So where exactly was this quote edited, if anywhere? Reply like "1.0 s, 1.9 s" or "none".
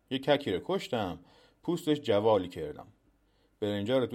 none